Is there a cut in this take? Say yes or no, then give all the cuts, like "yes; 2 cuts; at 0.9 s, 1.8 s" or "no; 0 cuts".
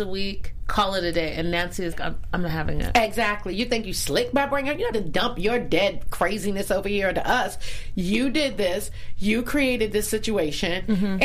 yes; 2 cuts; at 1.9 s, 4.9 s